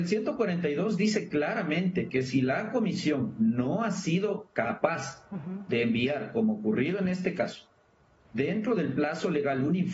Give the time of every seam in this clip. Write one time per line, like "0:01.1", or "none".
none